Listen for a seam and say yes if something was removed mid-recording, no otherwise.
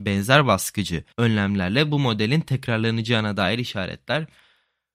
yes